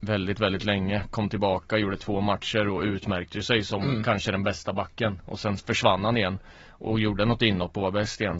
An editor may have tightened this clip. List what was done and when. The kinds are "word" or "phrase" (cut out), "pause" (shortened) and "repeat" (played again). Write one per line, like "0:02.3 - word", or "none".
none